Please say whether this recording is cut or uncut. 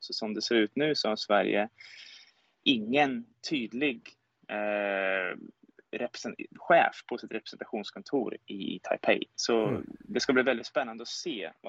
uncut